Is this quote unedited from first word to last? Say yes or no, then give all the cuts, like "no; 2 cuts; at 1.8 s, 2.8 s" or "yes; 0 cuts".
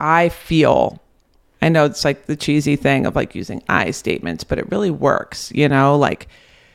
yes; 0 cuts